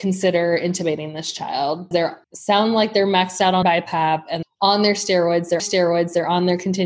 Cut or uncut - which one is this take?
cut